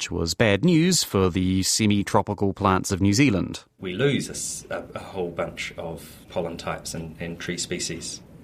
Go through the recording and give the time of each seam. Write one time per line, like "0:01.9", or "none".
none